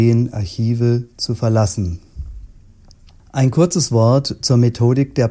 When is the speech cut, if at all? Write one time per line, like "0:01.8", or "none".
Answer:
none